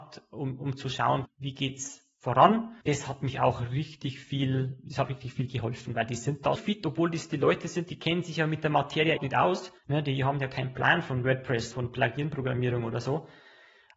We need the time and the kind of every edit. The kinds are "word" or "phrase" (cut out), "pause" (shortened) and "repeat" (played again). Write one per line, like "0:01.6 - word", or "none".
0:01.2 - word
0:05.0 - word
0:06.6 - word
0:09.2 - word
0:09.8 - pause
0:11.7 - word